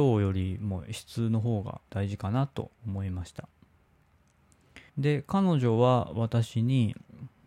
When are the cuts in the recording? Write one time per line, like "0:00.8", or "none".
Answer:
0:01.9
0:02.7
0:04.9